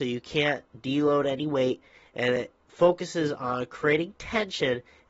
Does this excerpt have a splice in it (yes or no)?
no